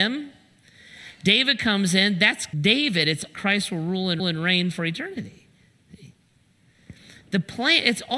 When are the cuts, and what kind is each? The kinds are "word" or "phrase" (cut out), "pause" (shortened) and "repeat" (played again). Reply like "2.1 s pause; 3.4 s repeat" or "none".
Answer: 2.5 s word; 3.3 s phrase; 4.2 s repeat